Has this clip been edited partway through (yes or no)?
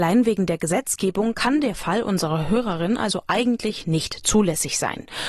no